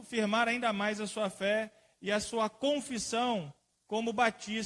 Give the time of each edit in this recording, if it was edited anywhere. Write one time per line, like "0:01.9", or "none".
none